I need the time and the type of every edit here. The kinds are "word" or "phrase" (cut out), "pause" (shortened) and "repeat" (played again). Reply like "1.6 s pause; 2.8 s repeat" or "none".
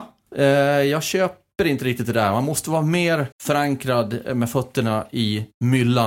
3.3 s pause